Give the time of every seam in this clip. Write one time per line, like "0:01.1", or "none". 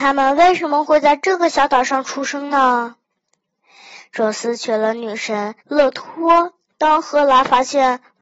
0:05.6
0:06.7